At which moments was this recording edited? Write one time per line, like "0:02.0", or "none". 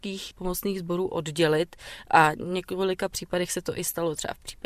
none